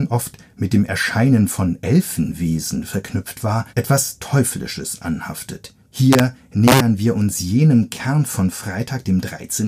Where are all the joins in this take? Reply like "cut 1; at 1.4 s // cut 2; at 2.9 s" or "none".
cut 1; at 3.7 s // cut 2; at 5.8 s